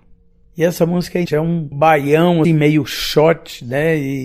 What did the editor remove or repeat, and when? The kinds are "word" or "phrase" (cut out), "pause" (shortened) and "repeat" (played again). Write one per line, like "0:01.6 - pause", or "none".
0:01.3 - word
0:02.4 - word